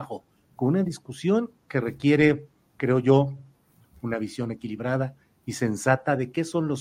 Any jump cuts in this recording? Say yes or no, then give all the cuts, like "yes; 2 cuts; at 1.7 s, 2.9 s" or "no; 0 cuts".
no; 0 cuts